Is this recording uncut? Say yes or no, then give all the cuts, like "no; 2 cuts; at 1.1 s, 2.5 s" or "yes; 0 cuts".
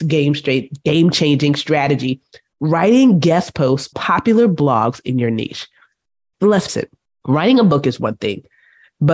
no; 2 cuts; at 3.9 s, 6.7 s